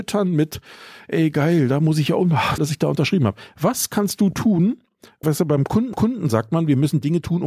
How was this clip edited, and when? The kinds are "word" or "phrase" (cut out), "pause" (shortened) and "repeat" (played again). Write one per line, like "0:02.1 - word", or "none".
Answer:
0:02.6 - phrase
0:05.2 - word
0:05.9 - repeat